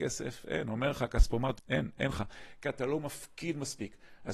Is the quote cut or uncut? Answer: cut